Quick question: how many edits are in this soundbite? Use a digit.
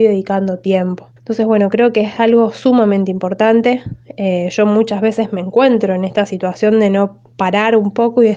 1